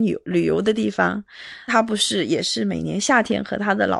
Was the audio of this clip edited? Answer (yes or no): yes